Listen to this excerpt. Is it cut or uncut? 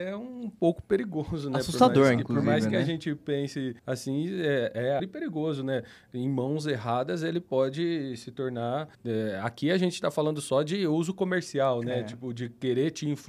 cut